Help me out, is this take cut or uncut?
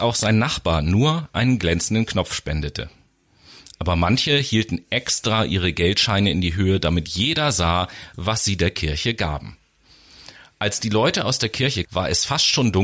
cut